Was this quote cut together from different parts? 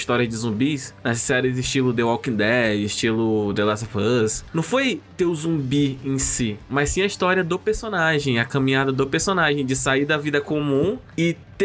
no; 0 cuts

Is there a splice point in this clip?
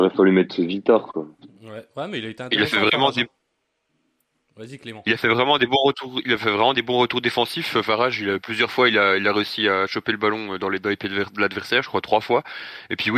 no; 0 cuts

